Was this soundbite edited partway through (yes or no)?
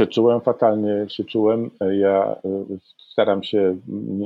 no